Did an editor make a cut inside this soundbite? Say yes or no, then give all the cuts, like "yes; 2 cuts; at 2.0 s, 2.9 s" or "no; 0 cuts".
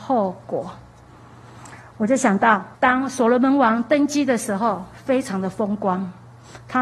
yes; 1 cut; at 2.7 s